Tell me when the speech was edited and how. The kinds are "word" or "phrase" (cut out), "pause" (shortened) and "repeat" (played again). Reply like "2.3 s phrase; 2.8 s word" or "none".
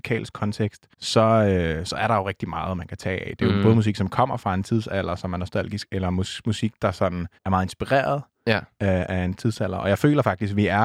0.9 s pause; 7.4 s pause